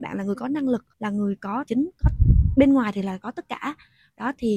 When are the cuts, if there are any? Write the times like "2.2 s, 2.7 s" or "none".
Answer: 0.9 s, 1.6 s

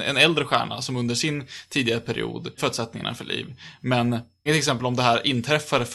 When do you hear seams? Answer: 2.6 s, 4.5 s

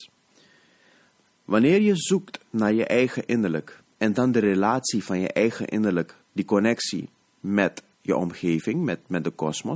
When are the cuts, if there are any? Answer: 2.5 s, 6.2 s, 7.9 s

